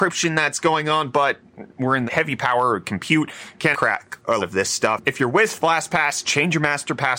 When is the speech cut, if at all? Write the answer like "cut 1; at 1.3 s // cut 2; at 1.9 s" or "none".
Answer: cut 1; at 1.7 s // cut 2; at 2.1 s // cut 3; at 3.7 s // cut 4; at 4.4 s